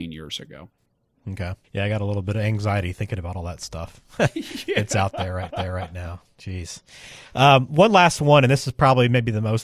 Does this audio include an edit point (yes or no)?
yes